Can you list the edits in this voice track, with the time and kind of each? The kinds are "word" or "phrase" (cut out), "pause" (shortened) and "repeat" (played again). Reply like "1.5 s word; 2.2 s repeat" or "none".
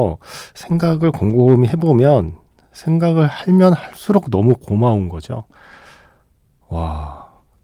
none